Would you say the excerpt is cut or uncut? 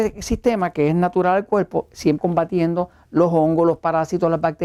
cut